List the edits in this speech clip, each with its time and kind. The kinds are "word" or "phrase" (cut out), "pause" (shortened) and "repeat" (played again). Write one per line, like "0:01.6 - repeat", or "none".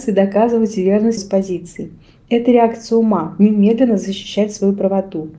0:01.2 - word